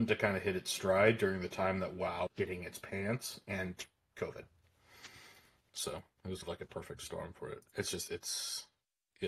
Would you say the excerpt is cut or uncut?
cut